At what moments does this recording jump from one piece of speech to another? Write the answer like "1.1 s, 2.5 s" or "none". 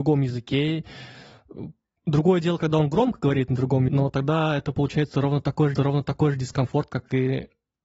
3.9 s, 5.7 s